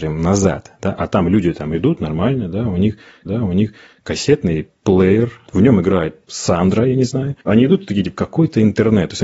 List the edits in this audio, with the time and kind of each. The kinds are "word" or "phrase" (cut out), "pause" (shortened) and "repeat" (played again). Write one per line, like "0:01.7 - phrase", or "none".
0:03.3 - repeat
0:05.5 - word
0:07.4 - pause